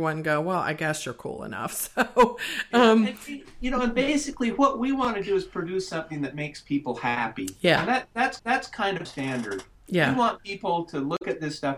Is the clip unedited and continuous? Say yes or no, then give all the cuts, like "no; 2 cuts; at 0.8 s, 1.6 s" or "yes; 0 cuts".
no; 2 cuts; at 8.4 s, 9.1 s